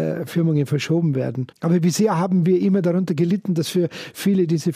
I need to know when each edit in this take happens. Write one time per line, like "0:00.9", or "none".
0:01.5